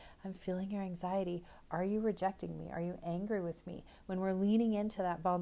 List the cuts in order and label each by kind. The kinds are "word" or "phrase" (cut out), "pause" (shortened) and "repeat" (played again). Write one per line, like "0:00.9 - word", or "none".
none